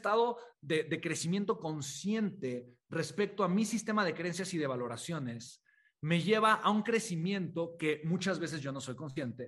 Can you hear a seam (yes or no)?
no